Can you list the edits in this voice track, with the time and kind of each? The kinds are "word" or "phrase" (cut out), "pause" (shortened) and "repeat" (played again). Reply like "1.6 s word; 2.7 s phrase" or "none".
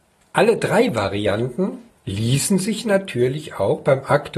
1.9 s pause